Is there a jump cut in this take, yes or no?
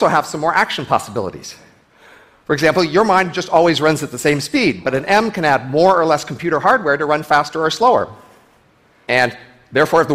no